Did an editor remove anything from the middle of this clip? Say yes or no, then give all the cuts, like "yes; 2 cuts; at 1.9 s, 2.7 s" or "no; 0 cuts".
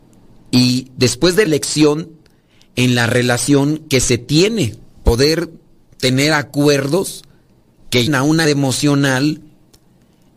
yes; 4 cuts; at 1.5 s, 5.0 s, 8.1 s, 8.4 s